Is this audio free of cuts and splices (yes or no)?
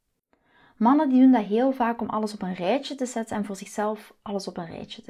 yes